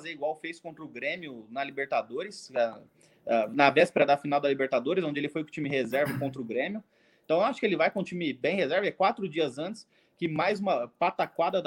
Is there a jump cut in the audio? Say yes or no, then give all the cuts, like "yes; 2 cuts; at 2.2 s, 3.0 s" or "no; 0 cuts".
no; 0 cuts